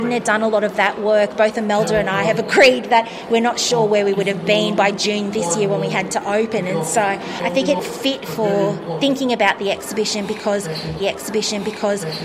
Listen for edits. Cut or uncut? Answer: cut